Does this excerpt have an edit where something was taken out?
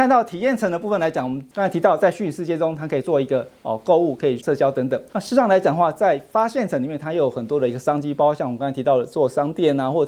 yes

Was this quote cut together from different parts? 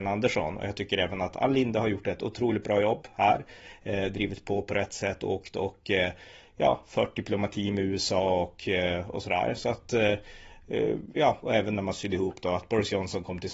no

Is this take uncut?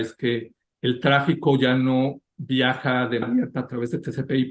no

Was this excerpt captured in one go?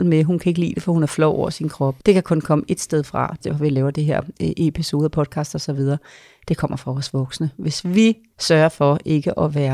no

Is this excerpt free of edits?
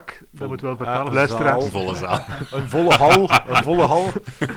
no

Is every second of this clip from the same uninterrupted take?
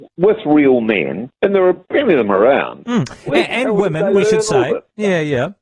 no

